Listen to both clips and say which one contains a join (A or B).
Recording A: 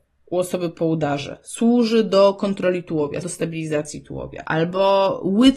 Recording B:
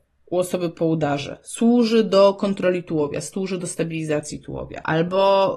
A